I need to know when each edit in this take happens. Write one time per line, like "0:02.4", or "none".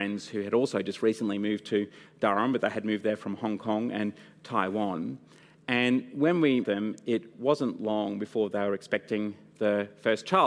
0:06.6